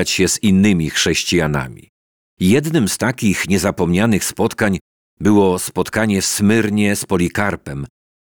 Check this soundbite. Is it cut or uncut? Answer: uncut